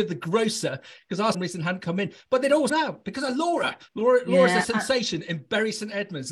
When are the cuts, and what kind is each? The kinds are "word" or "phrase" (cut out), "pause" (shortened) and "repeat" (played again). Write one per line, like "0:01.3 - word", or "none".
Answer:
0:01.3 - phrase
0:02.7 - word
0:03.9 - pause